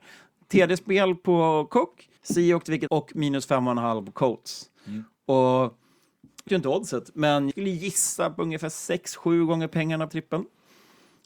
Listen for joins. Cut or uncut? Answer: cut